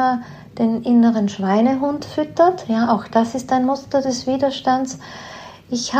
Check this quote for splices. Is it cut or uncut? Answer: uncut